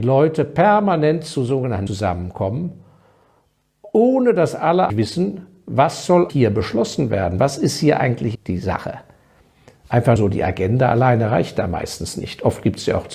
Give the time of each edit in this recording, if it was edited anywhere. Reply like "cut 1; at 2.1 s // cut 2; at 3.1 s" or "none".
cut 1; at 1.9 s // cut 2; at 4.9 s // cut 3; at 6.3 s // cut 4; at 8.3 s // cut 5; at 10.2 s